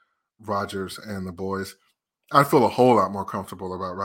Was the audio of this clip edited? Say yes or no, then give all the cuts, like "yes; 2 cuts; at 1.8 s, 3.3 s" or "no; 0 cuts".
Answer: no; 0 cuts